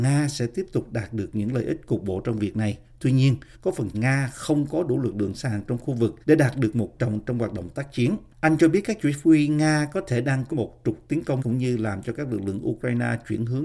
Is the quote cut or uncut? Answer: cut